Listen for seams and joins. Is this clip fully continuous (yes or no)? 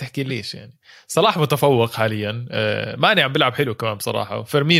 yes